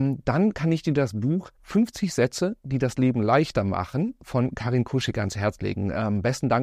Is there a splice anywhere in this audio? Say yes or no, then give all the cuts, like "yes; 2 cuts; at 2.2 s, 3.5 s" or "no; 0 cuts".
yes; 1 cut; at 1.6 s